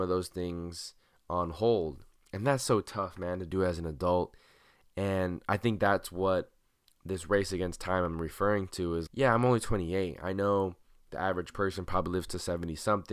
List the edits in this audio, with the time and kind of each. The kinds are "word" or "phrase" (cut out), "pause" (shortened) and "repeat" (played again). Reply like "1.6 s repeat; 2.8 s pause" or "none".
9.1 s word